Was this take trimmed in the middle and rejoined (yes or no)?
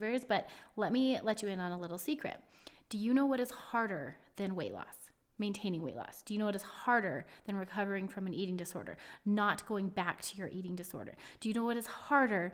no